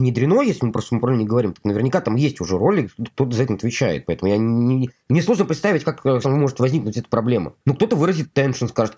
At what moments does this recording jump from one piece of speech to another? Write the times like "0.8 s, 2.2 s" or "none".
3.5 s, 6.2 s, 7.6 s